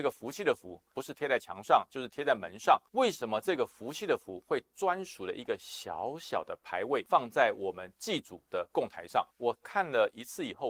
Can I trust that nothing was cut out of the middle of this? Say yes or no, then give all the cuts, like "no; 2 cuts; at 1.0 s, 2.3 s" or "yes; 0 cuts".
no; 2 cuts; at 0.9 s, 8.5 s